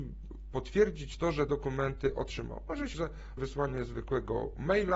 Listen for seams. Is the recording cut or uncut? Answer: cut